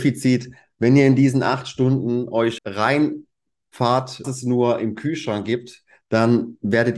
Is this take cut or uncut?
cut